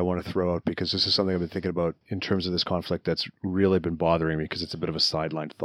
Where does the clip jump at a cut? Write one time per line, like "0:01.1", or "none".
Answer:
0:02.0
0:03.3